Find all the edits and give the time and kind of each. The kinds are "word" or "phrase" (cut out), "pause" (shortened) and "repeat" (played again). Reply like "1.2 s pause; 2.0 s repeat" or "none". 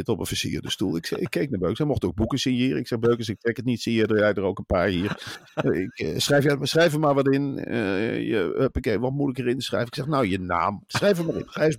10.9 s pause